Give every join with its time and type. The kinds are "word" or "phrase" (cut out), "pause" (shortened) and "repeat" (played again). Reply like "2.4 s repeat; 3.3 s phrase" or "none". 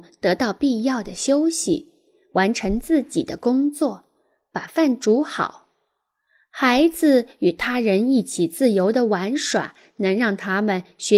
none